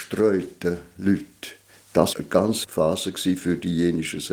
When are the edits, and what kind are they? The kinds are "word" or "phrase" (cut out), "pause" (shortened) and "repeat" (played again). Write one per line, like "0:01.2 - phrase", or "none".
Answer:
0:02.1 - word
0:02.6 - word